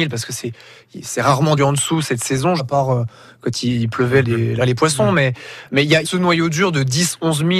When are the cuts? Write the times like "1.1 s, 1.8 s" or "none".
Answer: 1.6 s, 2.6 s, 4.2 s, 4.6 s, 6.0 s